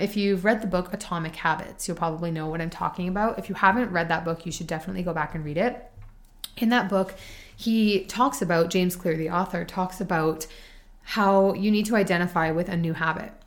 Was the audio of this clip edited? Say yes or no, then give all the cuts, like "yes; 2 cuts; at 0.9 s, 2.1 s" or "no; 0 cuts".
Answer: no; 0 cuts